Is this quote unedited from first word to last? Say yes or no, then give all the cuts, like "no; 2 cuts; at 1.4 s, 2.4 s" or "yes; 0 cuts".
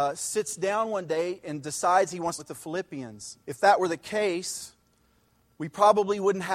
no; 2 cuts; at 2.4 s, 3.4 s